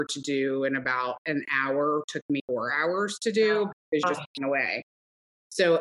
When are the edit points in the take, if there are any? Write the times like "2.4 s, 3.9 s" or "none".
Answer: 2.4 s, 4.0 s, 4.4 s

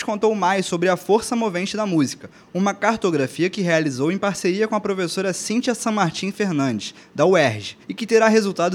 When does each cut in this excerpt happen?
7.8 s

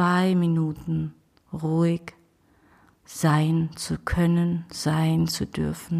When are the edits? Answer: none

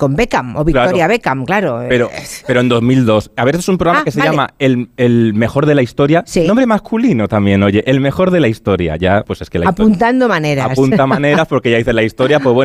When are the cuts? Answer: 9.2 s

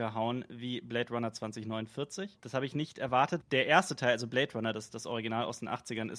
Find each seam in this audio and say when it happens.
3.4 s

